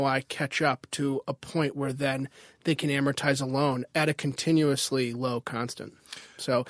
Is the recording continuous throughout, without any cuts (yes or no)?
yes